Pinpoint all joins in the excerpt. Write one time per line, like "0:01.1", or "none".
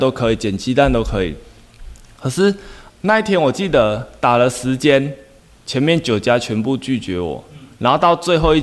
0:02.9